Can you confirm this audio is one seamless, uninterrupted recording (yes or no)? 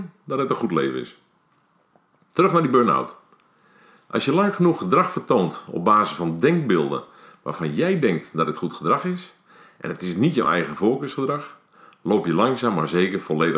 yes